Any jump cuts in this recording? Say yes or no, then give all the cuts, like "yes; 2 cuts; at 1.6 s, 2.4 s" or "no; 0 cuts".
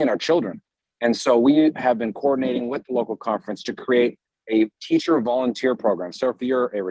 no; 0 cuts